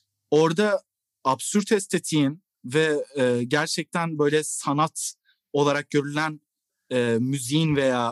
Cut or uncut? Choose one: uncut